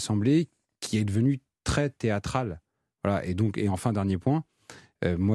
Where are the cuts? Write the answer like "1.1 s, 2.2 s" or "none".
none